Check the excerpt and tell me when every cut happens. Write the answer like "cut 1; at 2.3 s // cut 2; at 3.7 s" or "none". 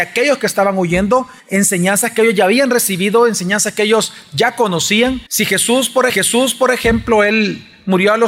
cut 1; at 1.4 s // cut 2; at 5.3 s // cut 3; at 6.1 s